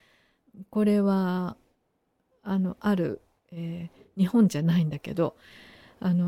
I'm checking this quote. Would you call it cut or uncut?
uncut